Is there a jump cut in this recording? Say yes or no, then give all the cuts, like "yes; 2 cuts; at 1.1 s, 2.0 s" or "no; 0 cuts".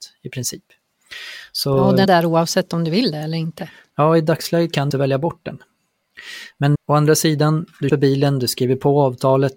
yes; 4 cuts; at 2.0 s, 4.9 s, 6.7 s, 7.9 s